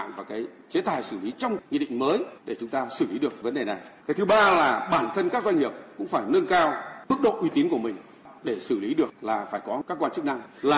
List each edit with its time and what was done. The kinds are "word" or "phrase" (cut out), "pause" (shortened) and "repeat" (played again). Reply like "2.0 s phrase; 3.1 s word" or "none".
none